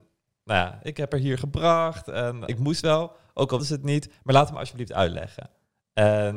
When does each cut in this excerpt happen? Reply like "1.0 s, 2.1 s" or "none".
2.5 s, 3.6 s